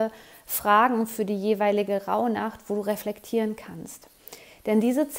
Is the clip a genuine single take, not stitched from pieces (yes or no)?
yes